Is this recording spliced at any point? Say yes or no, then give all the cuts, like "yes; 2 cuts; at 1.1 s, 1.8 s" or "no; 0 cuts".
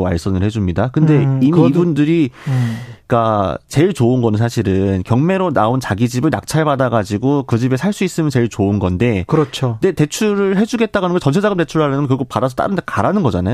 no; 0 cuts